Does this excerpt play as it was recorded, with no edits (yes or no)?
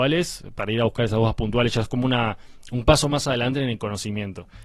yes